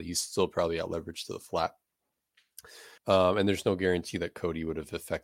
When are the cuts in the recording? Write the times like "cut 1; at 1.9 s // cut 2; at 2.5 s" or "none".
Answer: cut 1; at 3.0 s

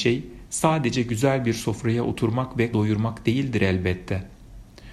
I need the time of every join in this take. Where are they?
cut 1; at 2.7 s

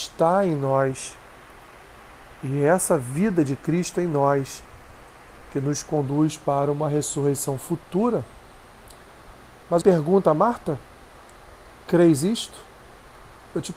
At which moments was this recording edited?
cut 1; at 9.8 s

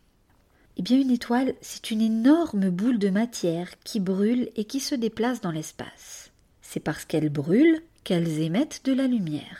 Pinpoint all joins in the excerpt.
none

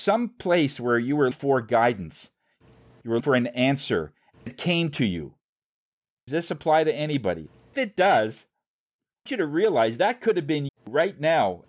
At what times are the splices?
cut 1; at 1.3 s // cut 2; at 3.2 s // cut 3; at 4.5 s // cut 4; at 6.3 s // cut 5; at 7.7 s // cut 6; at 9.3 s // cut 7; at 10.7 s

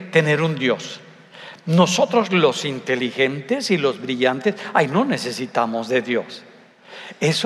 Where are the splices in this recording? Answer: none

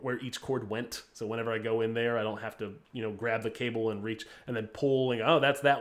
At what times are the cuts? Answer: cut 1; at 2.8 s

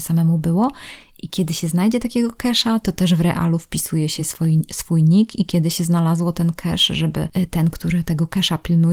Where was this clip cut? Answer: none

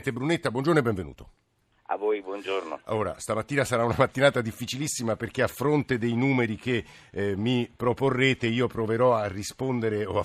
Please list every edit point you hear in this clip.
none

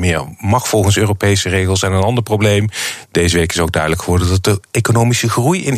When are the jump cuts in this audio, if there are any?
none

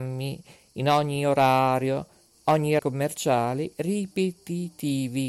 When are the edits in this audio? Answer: cut 1; at 2.8 s

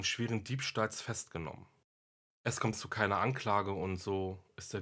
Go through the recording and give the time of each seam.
cut 1; at 2.7 s

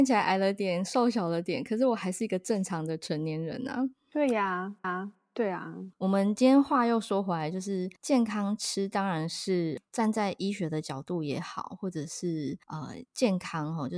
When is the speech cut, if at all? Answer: cut 1; at 4.8 s // cut 2; at 5.9 s // cut 3; at 8.0 s // cut 4; at 12.6 s

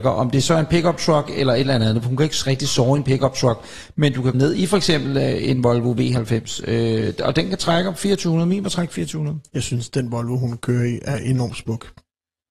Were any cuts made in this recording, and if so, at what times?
cut 1; at 4.3 s // cut 2; at 9.5 s

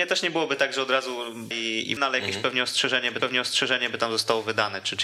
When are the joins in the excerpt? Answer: cut 1; at 1.5 s // cut 2; at 2.0 s // cut 3; at 3.2 s

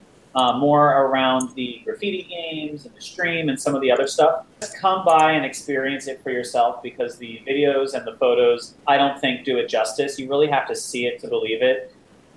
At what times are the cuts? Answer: cut 1; at 4.5 s // cut 2; at 8.8 s

